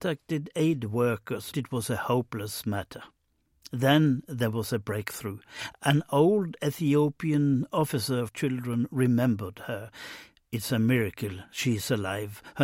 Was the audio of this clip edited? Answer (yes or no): yes